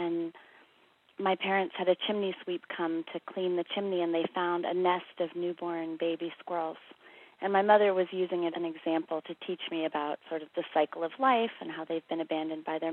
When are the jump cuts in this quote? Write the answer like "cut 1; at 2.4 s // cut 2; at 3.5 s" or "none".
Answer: cut 1; at 8.5 s